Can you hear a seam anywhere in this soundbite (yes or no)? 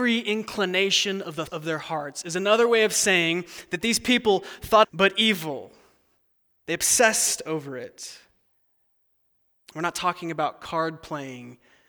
yes